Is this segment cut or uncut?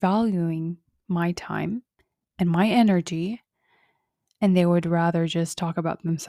uncut